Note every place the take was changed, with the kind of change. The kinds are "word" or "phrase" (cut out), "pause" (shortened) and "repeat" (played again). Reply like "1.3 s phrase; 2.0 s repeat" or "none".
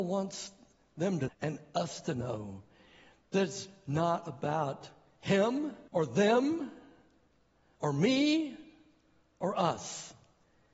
1.3 s word; 5.9 s pause